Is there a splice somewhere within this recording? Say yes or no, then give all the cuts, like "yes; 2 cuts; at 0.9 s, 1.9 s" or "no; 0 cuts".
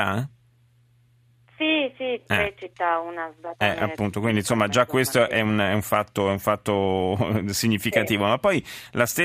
no; 0 cuts